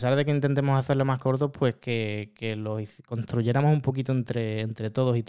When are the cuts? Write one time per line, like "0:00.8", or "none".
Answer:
none